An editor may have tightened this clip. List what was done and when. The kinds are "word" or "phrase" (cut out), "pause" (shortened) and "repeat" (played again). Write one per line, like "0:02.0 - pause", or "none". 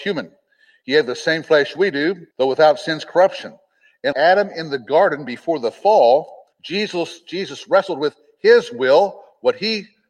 0:02.3 - pause
0:04.1 - word
0:06.5 - pause